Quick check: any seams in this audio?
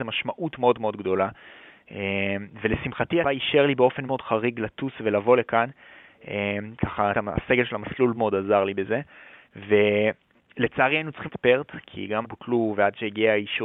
yes; 6 cuts; at 3.2 s, 4.1 s, 7.1 s, 8.1 s, 11.3 s, 12.2 s

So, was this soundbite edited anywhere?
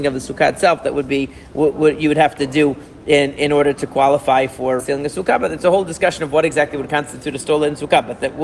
yes; 1 cut; at 4.8 s

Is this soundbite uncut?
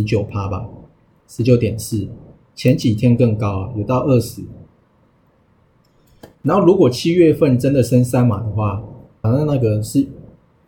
no; 2 cuts; at 6.3 s, 9.2 s

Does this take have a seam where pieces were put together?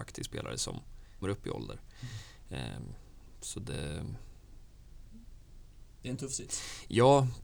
yes; 1 cut; at 1.2 s

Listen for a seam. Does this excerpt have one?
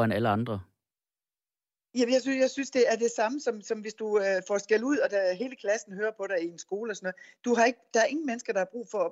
no; 0 cuts

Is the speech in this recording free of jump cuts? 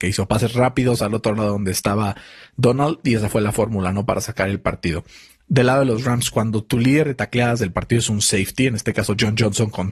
yes; 0 cuts

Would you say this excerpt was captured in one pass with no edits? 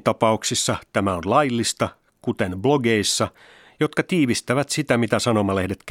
yes; 0 cuts

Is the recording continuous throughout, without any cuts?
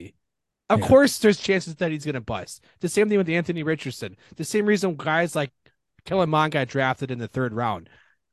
yes; 0 cuts

